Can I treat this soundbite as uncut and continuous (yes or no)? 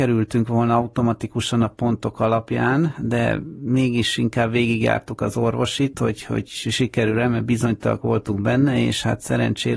yes